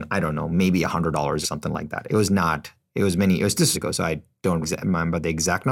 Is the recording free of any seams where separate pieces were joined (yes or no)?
no